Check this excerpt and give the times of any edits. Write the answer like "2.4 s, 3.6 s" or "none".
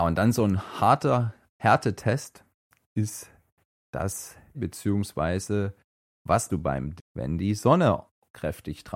1.5 s, 4.5 s, 6.5 s, 7.0 s